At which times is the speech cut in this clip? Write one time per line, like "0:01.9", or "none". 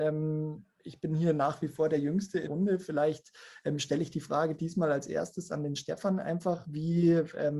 0:02.5